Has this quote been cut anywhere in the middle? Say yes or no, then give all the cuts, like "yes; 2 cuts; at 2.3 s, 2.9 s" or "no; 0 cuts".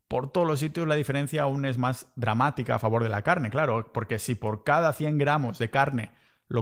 no; 0 cuts